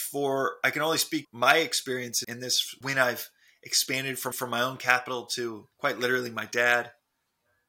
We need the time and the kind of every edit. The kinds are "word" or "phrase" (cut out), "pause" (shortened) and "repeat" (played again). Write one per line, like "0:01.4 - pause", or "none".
0:01.2 - word
0:02.2 - word
0:02.8 - word
0:04.3 - repeat
0:05.7 - pause

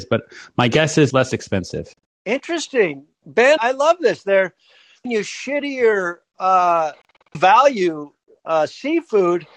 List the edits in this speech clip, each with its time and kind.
0:01.1 - word
0:02.1 - pause
0:03.6 - word
0:05.0 - word
0:07.3 - word

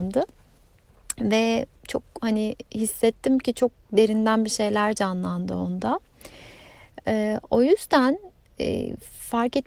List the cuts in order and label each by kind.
none

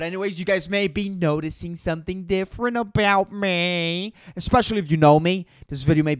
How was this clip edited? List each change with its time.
none

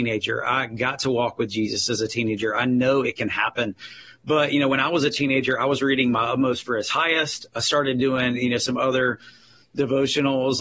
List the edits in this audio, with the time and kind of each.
none

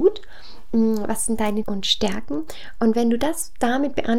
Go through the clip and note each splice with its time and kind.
0:01.6 - word

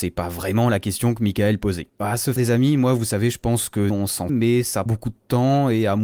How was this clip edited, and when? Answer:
0:01.9 - pause
0:02.4 - word
0:03.9 - phrase
0:04.3 - word
0:04.9 - word

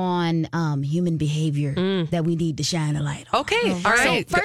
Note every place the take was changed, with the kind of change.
none

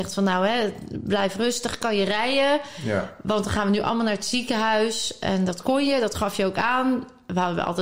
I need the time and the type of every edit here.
none

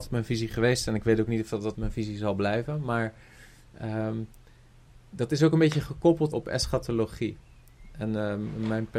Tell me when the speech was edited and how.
0:01.7 - word
0:05.0 - pause
0:06.3 - phrase

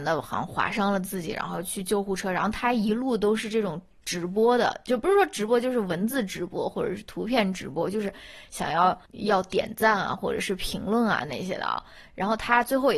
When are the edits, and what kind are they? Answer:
0:09.1 - pause

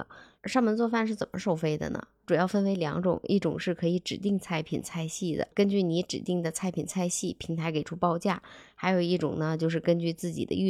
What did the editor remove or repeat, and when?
0:05.5 - pause

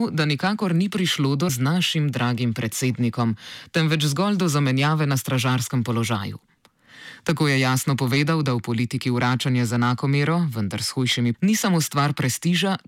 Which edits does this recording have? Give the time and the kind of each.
0:01.5 - word
0:11.3 - word

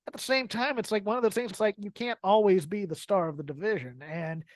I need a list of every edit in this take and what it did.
0:01.5 - word

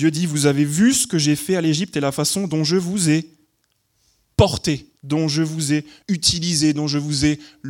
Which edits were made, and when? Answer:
0:05.0 - pause
0:06.0 - pause

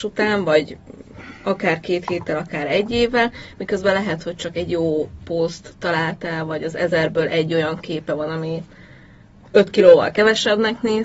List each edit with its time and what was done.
none

